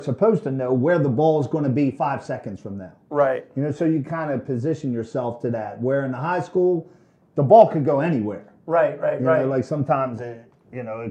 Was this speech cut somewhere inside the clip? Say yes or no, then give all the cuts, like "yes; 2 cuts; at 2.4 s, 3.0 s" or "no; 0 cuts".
no; 0 cuts